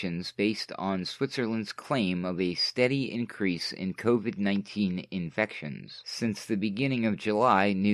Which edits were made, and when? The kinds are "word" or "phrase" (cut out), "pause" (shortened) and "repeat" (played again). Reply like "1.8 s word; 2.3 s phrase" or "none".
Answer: none